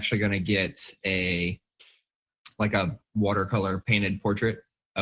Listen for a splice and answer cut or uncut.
uncut